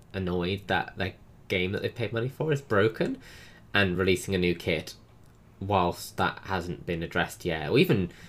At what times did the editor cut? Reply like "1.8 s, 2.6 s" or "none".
none